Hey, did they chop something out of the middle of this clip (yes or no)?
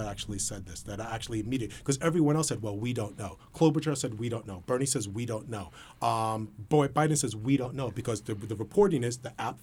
no